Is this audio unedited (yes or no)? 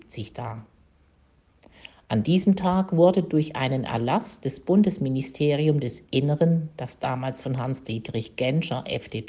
yes